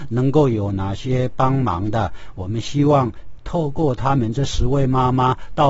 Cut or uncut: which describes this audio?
uncut